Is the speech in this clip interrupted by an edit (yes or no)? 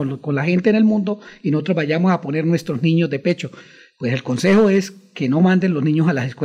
no